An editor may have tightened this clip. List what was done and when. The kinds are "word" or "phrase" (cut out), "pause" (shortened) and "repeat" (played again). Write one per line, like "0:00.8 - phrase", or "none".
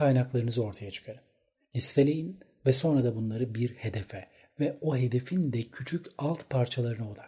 none